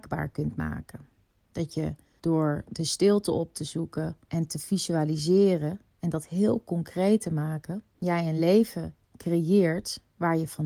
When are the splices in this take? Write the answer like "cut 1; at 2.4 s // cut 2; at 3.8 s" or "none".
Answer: none